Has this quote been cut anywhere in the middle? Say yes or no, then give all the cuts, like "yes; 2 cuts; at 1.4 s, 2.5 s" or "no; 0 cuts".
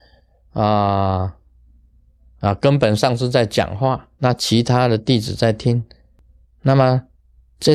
yes; 1 cut; at 4.1 s